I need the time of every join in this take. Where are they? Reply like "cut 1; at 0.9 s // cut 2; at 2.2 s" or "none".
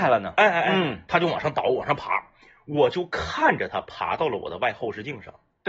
none